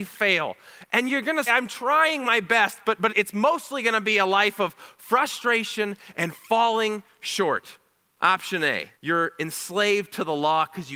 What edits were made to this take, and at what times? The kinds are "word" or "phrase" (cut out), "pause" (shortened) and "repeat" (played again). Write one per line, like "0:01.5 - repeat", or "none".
0:01.5 - word
0:03.1 - word
0:08.9 - pause